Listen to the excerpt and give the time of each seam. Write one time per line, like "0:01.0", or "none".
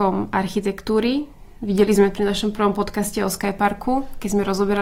0:02.1